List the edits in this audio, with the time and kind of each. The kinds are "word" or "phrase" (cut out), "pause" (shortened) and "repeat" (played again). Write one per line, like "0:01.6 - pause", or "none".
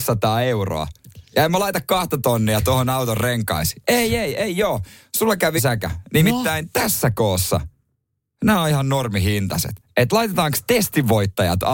0:05.6 - word

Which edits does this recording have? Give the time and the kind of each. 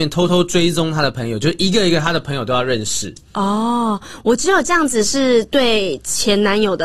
0:03.3 - pause

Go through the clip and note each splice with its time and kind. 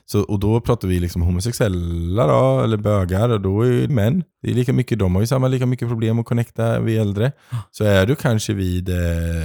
0:03.9 - phrase
0:04.3 - pause

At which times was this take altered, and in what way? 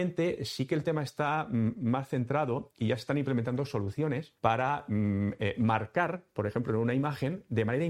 0:04.4 - pause

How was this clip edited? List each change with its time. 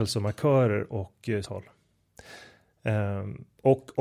0:01.4 - phrase

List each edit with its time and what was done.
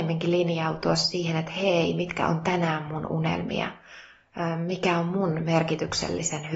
none

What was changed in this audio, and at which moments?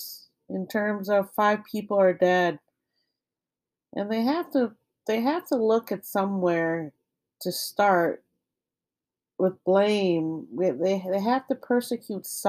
none

